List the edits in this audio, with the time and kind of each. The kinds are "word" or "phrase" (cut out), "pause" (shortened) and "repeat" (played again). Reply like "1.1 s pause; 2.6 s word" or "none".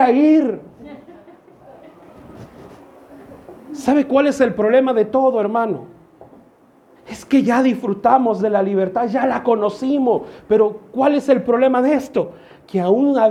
none

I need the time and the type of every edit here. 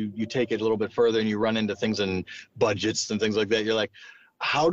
2.0 s phrase

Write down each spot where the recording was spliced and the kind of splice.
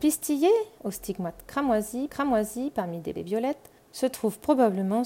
2.1 s repeat; 3.2 s word; 3.8 s pause

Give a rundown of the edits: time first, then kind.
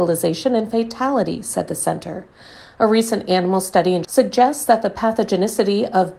4.0 s word

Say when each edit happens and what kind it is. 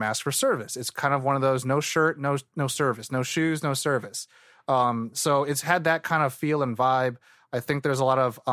none

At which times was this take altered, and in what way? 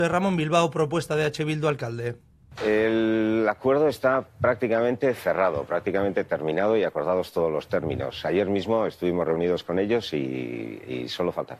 none

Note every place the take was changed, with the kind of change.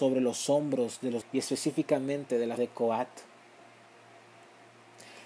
1.2 s word; 2.6 s word

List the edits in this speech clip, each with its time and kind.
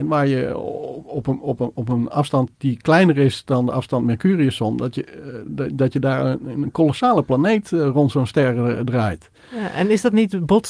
none

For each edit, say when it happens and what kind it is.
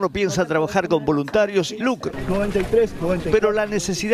1.8 s phrase

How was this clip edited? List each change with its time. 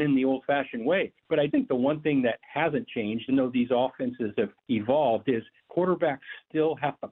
1.2 s pause; 1.5 s word; 3.3 s word; 4.6 s pause; 5.6 s pause

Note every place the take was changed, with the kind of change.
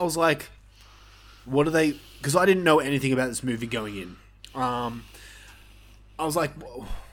none

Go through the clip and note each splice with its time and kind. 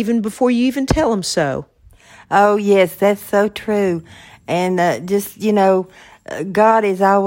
none

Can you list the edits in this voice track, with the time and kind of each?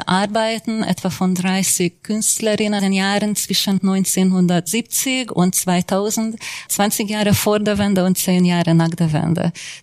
2.8 s phrase; 6.7 s word

